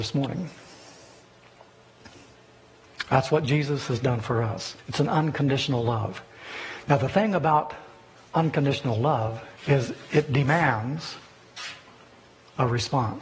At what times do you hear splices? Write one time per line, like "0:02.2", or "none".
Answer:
0:04.8
0:08.2
0:09.6